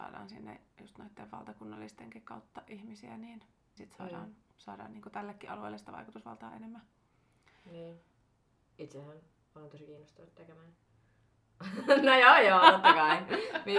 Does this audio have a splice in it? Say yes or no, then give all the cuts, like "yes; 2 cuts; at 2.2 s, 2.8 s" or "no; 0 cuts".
yes; 1 cut; at 3.8 s